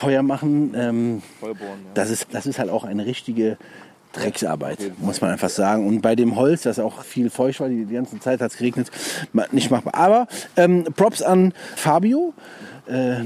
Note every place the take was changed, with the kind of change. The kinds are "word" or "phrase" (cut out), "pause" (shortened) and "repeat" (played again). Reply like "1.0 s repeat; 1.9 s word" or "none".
2.2 s word; 7.0 s word; 11.8 s word